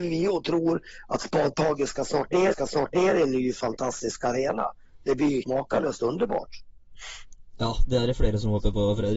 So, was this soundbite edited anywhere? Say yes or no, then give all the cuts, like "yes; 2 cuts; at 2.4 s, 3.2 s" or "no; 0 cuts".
yes; 2 cuts; at 2.5 s, 5.4 s